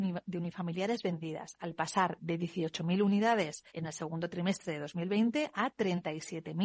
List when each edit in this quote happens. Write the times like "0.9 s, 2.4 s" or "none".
3.7 s